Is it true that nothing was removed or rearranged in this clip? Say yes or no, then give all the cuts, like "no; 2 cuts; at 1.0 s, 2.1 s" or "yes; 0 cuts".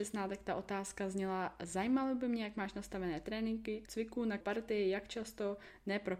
no; 2 cuts; at 3.9 s, 4.4 s